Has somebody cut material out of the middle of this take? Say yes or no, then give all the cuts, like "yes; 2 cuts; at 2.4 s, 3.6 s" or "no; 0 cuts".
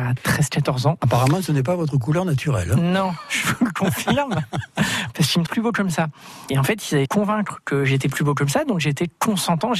yes; 2 cuts; at 5.5 s, 7.1 s